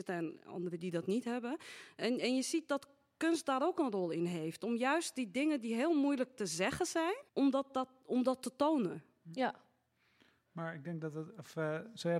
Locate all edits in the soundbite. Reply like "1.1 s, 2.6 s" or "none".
7.3 s